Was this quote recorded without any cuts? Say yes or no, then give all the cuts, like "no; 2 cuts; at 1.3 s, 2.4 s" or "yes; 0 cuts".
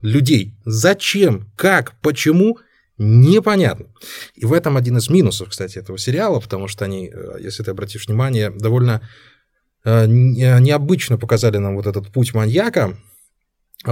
yes; 0 cuts